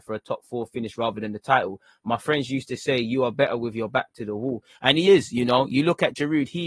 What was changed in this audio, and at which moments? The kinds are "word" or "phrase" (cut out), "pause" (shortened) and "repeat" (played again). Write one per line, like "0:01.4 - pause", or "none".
none